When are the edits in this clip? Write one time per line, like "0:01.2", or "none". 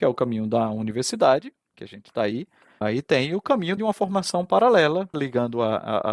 0:01.7
0:02.8
0:03.8
0:05.1